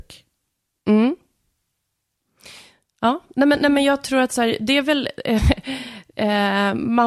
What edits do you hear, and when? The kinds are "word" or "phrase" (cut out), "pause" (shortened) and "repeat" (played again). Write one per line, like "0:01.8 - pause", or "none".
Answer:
none